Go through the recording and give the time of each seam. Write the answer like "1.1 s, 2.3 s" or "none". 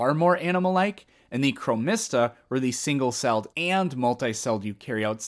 3.5 s